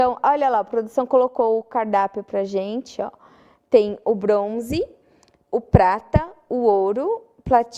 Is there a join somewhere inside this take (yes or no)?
no